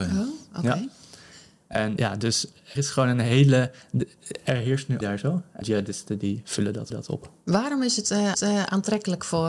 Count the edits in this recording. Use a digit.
6